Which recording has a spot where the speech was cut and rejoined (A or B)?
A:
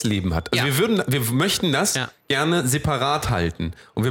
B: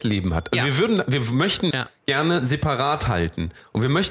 B